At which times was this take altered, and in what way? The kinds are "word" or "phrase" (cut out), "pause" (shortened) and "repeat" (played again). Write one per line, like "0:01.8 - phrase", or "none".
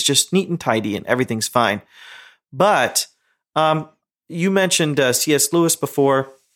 none